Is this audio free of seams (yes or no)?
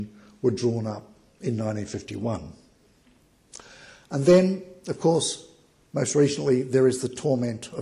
yes